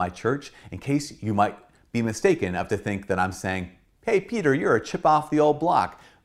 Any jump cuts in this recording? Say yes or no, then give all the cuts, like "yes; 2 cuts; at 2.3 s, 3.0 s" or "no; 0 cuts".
no; 0 cuts